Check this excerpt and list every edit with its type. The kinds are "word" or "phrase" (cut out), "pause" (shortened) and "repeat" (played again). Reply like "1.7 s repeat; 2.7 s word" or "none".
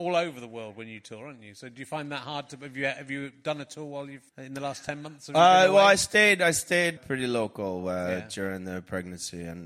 4.3 s pause; 7.0 s word